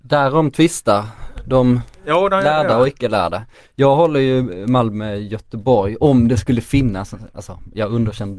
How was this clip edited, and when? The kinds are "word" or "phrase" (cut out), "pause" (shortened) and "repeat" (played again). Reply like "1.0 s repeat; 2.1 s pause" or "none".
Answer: none